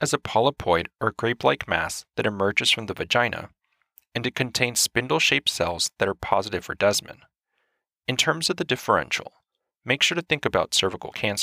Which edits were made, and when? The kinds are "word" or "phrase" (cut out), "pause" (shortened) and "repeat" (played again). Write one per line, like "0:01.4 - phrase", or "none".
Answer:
none